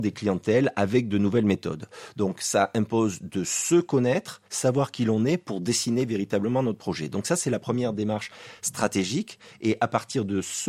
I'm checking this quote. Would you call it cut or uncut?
cut